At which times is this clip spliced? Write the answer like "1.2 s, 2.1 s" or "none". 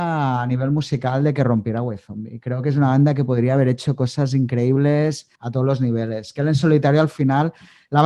5.3 s